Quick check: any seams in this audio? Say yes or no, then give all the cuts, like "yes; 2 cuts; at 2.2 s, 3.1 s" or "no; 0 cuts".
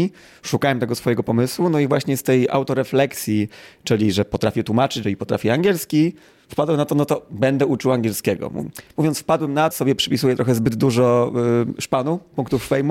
yes; 2 cuts; at 5.0 s, 9.7 s